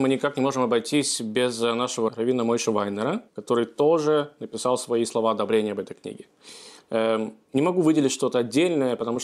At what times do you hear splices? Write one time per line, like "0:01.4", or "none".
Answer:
0:02.1
0:03.3